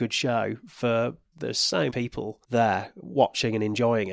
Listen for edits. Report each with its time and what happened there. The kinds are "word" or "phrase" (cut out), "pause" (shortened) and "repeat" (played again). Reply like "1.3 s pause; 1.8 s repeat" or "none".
1.3 s phrase; 1.9 s word; 2.4 s pause